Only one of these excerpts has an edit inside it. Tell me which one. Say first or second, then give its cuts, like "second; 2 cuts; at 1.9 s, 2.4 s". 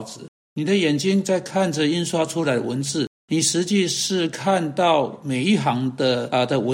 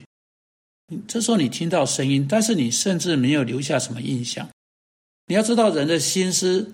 first; 1 cut; at 3.1 s